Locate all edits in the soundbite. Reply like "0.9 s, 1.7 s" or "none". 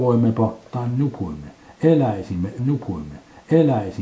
2.6 s